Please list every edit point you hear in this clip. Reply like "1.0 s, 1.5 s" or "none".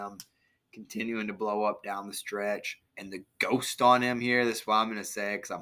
2.9 s